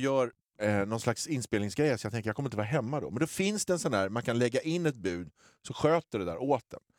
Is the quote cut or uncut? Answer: uncut